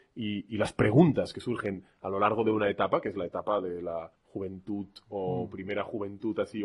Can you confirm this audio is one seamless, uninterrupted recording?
no; 1 cut; at 4.1 s

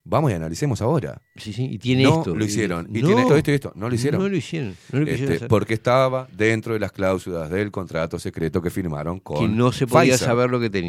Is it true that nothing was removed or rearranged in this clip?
no; 1 cut; at 3.3 s

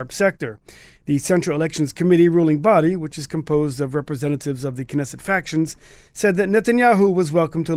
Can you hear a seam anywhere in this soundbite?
no; 0 cuts

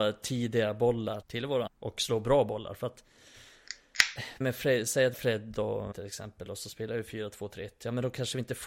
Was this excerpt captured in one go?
no; 5 cuts; at 1.2 s, 1.7 s, 4.4 s, 5.1 s, 5.9 s

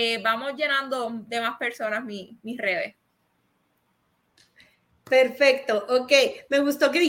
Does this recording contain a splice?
no; 0 cuts

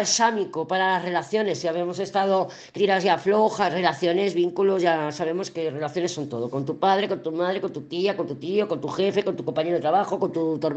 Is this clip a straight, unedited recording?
no; 1 cut; at 2.8 s

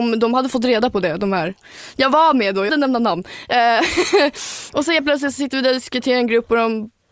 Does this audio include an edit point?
yes; 1 cut; at 2.7 s

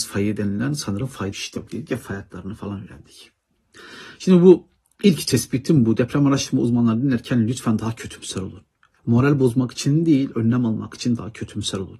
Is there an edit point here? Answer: yes; 2 cuts; at 1.3 s, 1.7 s

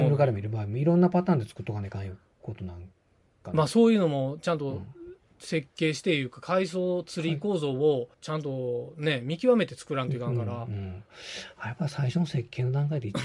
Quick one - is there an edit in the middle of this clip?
yes; 1 cut; at 8.1 s

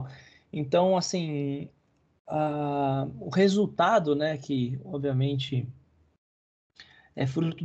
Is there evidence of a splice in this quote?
no; 0 cuts

